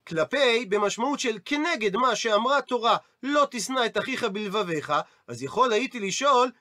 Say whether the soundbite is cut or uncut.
uncut